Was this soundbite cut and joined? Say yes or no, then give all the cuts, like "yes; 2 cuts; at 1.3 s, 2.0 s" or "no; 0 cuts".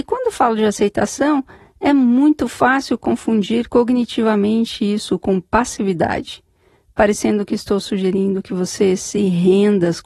no; 0 cuts